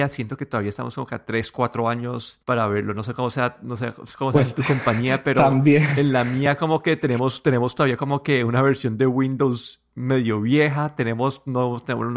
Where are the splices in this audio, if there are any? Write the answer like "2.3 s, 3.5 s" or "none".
2.4 s